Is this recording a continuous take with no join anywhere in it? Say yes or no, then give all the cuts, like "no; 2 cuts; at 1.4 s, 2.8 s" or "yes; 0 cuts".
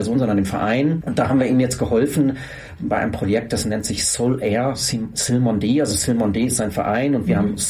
yes; 0 cuts